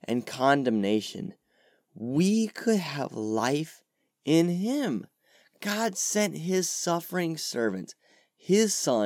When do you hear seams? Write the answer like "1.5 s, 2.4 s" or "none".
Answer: none